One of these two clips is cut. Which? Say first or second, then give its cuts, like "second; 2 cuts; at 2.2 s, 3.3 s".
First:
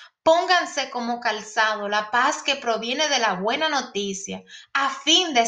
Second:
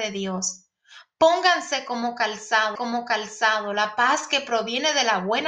second; 1 cut; at 2.8 s